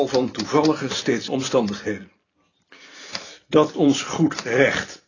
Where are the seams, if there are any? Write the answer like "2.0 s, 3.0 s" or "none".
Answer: 1.3 s, 3.7 s